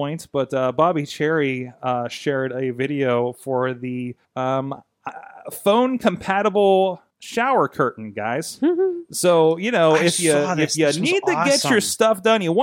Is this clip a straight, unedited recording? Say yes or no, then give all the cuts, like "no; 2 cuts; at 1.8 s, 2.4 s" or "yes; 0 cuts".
no; 2 cuts; at 4.2 s, 7.1 s